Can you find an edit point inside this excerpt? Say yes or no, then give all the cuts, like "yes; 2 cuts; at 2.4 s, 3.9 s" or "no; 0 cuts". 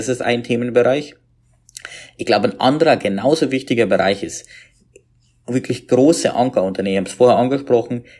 no; 0 cuts